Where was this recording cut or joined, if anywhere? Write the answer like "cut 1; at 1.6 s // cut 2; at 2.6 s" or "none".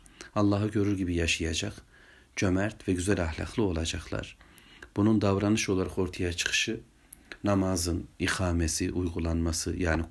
none